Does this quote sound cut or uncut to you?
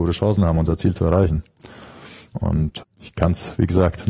cut